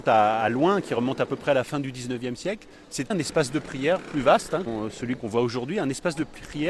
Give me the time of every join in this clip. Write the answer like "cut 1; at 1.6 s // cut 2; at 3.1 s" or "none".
cut 1; at 3.1 s // cut 2; at 4.7 s